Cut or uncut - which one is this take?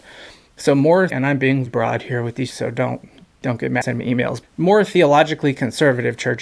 cut